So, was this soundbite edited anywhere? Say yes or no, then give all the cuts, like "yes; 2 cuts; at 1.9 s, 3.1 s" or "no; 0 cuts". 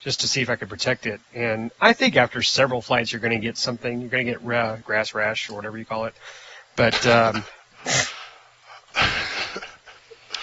yes; 1 cut; at 4.8 s